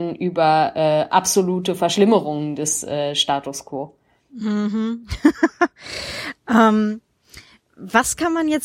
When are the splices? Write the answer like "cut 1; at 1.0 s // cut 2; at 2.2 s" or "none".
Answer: none